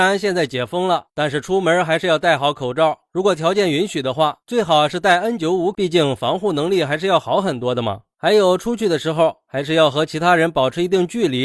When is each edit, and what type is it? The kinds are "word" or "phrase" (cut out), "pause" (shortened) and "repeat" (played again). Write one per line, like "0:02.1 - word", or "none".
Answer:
0:05.7 - phrase